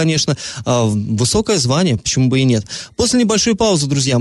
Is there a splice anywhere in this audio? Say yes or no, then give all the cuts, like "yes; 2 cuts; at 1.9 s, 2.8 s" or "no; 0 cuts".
no; 0 cuts